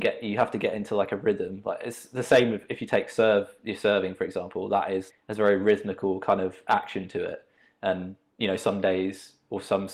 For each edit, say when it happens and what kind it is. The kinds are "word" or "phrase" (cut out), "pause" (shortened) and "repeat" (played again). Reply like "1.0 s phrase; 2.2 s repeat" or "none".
5.1 s word